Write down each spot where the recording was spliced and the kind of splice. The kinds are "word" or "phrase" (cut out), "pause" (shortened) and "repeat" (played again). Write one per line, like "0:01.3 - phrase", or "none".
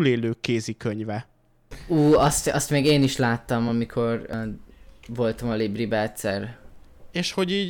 none